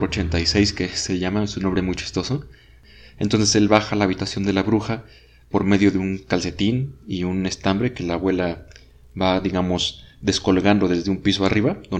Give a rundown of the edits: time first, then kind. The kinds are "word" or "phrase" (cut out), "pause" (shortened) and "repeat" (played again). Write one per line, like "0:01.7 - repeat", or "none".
none